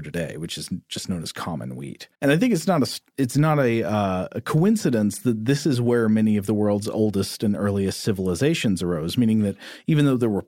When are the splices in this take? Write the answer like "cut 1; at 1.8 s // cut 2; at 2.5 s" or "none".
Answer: cut 1; at 2.1 s